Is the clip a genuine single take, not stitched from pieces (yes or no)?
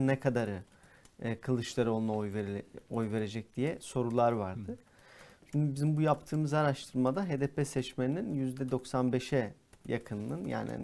yes